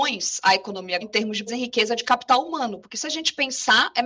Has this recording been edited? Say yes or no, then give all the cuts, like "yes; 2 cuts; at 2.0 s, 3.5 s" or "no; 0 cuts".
yes; 2 cuts; at 1.0 s, 1.5 s